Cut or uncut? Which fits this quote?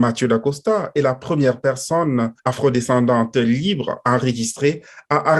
cut